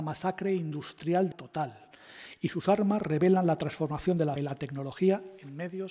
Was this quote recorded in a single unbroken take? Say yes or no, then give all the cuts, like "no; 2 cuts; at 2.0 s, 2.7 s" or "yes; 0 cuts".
no; 2 cuts; at 1.3 s, 4.4 s